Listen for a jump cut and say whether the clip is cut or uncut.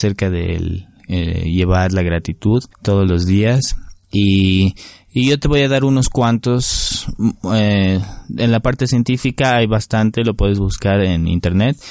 cut